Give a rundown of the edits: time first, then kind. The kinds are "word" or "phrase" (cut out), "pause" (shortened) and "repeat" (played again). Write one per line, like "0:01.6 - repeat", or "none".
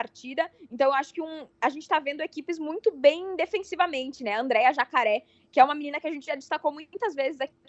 none